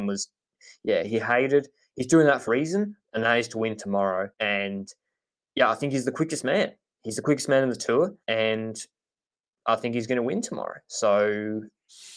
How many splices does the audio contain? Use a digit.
3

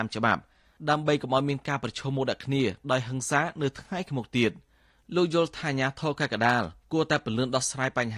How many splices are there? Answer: 0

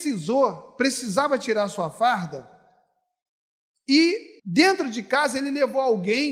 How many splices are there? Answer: 1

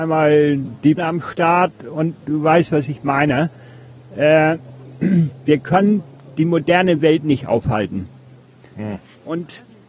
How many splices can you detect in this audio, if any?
1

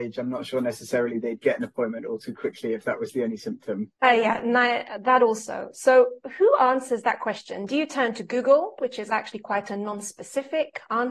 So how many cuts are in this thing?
1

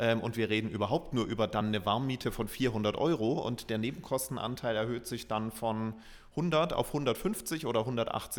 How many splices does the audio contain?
0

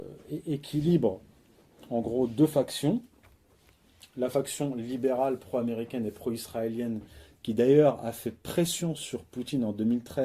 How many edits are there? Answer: 0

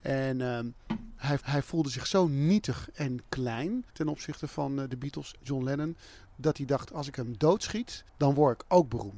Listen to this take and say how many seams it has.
4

